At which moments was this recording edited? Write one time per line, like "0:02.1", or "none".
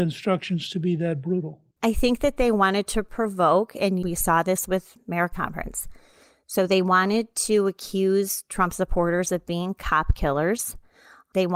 0:01.7
0:05.3